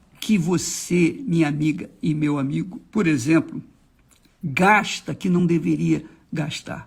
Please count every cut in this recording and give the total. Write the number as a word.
zero